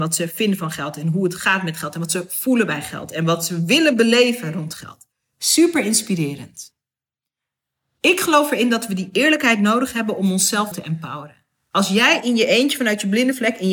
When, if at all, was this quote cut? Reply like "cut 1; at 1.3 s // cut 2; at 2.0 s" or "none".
cut 1; at 5.1 s // cut 2; at 10.7 s